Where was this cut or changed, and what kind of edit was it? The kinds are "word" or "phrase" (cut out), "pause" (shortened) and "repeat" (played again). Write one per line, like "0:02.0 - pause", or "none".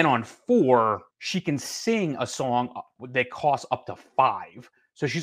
0:01.1 - pause